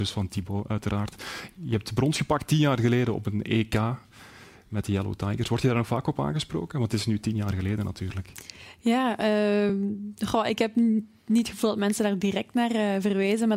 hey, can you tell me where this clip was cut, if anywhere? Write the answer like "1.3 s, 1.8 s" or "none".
none